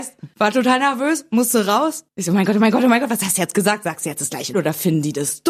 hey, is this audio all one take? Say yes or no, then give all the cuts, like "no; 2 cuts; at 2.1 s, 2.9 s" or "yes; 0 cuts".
no; 1 cut; at 4.5 s